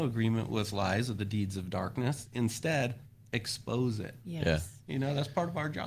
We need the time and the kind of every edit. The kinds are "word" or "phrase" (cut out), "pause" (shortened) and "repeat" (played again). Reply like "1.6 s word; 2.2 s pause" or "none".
none